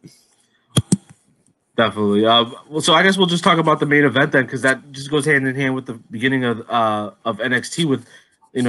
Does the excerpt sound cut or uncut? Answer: uncut